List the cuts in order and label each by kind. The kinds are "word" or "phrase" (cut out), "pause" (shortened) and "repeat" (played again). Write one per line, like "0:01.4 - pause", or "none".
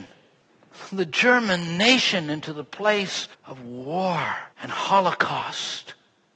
0:03.3 - pause
0:04.5 - pause